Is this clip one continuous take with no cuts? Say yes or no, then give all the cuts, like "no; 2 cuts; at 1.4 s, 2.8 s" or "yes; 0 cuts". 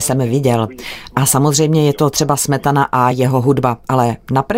yes; 0 cuts